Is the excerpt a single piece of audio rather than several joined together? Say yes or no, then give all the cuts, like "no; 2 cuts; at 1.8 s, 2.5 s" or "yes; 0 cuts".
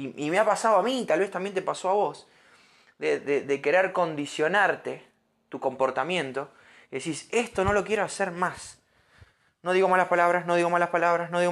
yes; 0 cuts